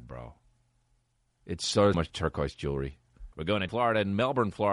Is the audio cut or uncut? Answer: cut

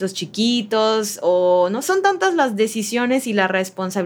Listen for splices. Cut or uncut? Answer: cut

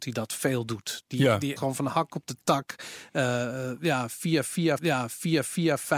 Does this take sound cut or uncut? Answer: cut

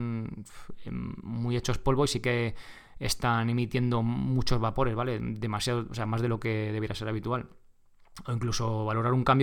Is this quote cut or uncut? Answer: uncut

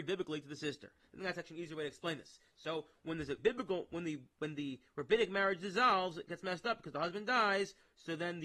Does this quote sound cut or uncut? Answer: cut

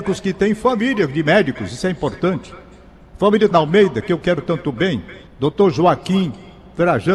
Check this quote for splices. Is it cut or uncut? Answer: cut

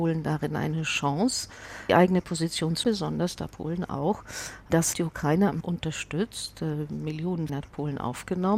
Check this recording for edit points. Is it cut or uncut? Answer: cut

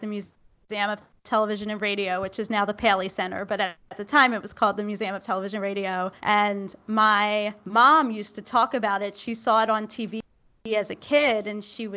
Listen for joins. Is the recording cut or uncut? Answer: cut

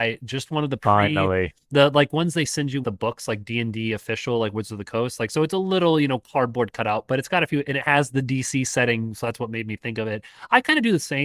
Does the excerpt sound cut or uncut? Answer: cut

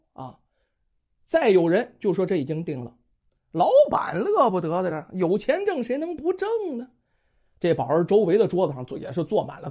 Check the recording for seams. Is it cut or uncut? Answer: uncut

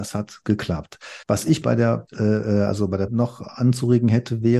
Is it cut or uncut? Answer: cut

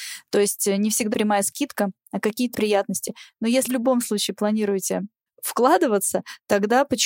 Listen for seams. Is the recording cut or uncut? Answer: cut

